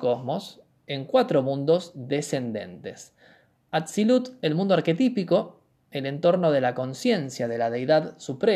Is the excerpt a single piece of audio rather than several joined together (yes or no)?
yes